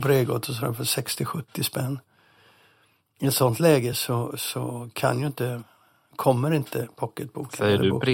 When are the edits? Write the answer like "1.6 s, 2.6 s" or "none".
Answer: none